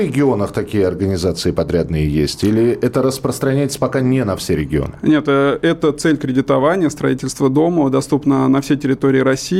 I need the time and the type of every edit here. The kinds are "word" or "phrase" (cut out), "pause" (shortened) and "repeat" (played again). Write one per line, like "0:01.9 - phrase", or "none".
none

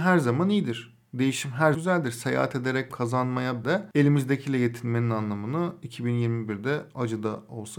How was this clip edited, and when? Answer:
0:01.7 - word
0:02.9 - word
0:03.6 - word

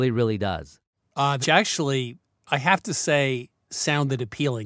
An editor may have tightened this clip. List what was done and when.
0:01.4 - phrase

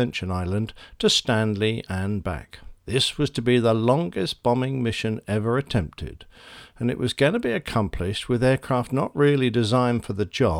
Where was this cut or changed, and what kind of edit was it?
0:02.8 - pause

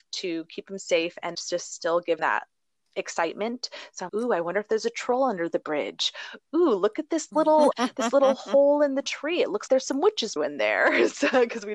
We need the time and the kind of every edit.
0:01.3 - word
0:02.2 - word
0:04.1 - word
0:07.7 - word
0:09.7 - word
0:10.4 - word

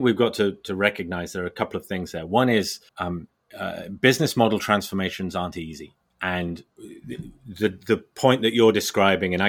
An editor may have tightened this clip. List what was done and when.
0:02.9 - pause

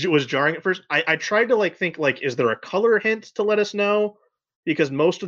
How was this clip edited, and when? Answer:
none

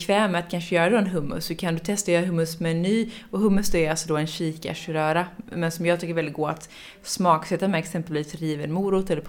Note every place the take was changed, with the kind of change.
none

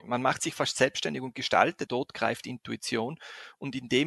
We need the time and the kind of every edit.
0:01.9 - word

